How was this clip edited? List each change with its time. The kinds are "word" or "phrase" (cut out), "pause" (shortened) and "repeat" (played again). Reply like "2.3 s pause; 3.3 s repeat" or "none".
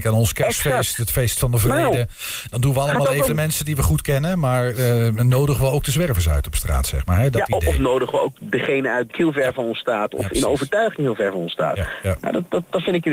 3.3 s phrase; 9.1 s phrase

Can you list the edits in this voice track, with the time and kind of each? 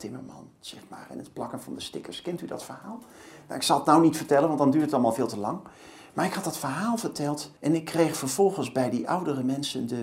7.6 s pause

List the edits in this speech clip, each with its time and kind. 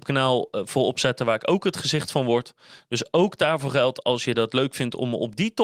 none

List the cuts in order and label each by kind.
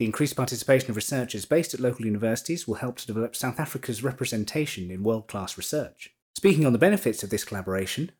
6.2 s pause

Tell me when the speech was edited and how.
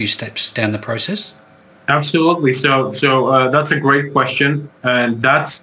1.6 s pause

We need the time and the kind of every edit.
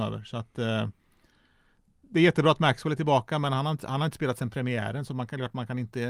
none

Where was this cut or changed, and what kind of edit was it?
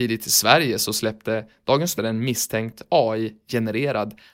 2.0 s word

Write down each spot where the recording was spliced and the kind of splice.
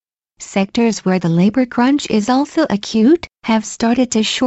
3.3 s pause

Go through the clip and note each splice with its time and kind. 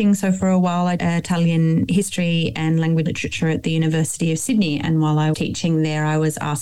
1.0 s word; 3.1 s word; 5.3 s word

